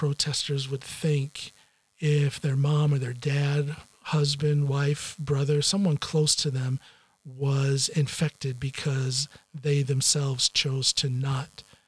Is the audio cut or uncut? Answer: uncut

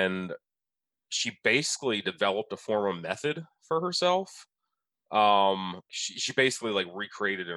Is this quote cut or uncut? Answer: cut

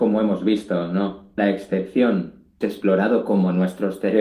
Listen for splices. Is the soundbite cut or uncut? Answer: cut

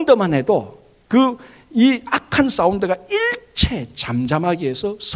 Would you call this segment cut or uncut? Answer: uncut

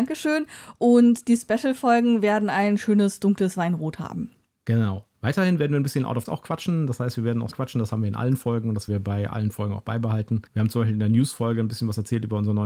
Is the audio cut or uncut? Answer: cut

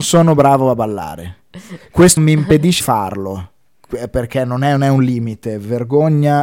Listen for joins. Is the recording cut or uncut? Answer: cut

